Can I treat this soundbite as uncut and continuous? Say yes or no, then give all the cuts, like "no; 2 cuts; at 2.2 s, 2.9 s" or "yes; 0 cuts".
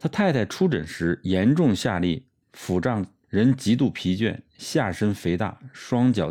no; 1 cut; at 2.4 s